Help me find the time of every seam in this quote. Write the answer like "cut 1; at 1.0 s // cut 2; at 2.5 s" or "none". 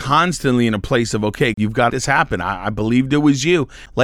cut 1; at 1.5 s // cut 2; at 1.9 s

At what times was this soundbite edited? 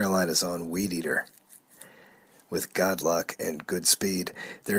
none

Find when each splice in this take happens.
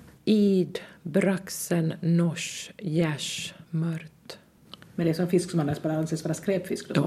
cut 1; at 3.6 s

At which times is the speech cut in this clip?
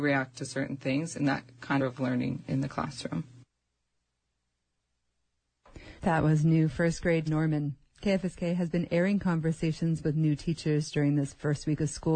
cut 1; at 1.8 s // cut 2; at 6.0 s // cut 3; at 7.3 s

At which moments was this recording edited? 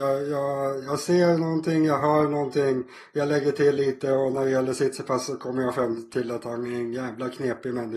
none

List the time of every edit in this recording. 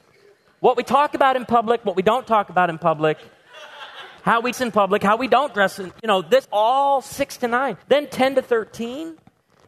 cut 1; at 4.2 s // cut 2; at 4.5 s // cut 3; at 6.4 s // cut 4; at 7.8 s

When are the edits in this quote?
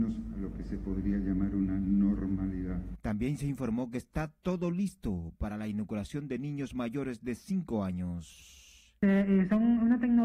none

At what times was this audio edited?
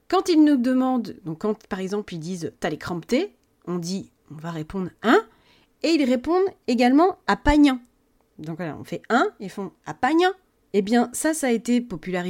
none

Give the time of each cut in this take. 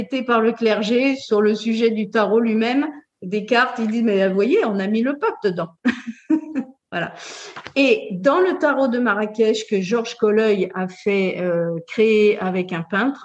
none

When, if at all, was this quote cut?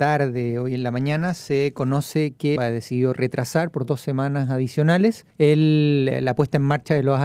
cut 1; at 2.6 s // cut 2; at 5.3 s

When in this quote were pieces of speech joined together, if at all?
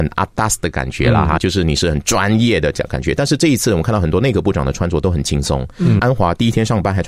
cut 1; at 1.4 s // cut 2; at 6.0 s

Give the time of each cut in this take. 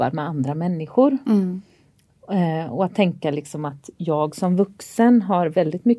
none

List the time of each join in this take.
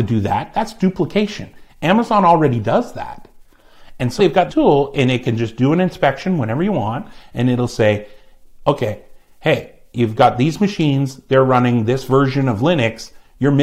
cut 1; at 4.2 s // cut 2; at 4.5 s

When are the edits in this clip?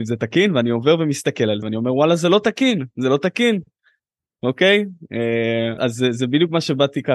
cut 1; at 1.6 s // cut 2; at 5.8 s

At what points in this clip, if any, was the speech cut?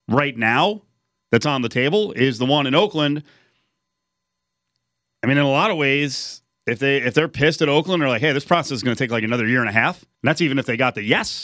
cut 1; at 10.1 s

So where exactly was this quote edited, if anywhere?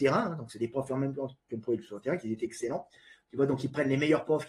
none

